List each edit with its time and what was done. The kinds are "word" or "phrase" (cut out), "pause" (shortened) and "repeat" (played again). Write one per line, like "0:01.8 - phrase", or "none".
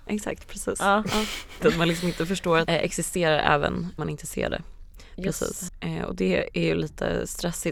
0:01.6 - word
0:02.7 - word
0:04.0 - word